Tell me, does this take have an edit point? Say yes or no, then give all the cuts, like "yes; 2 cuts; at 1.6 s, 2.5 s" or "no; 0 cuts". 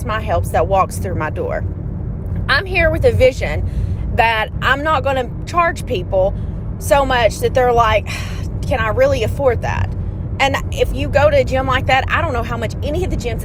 no; 0 cuts